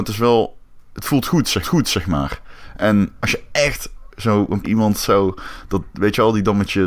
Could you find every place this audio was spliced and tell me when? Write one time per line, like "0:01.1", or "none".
0:01.6
0:03.2
0:04.1
0:04.6